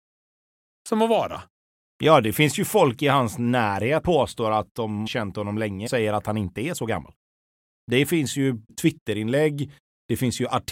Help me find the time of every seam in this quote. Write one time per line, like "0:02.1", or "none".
0:04.0
0:05.1
0:05.9
0:08.7

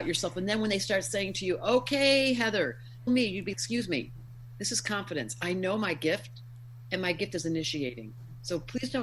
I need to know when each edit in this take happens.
0:03.1
0:03.5

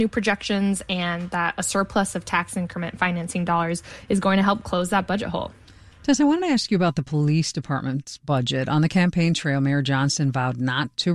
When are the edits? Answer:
none

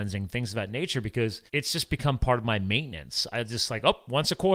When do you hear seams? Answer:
0:01.5

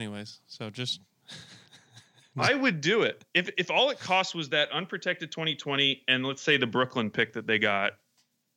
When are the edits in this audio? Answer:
none

